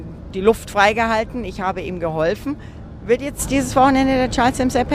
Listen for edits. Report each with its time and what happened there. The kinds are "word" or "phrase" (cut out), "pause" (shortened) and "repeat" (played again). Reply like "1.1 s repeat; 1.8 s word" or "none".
none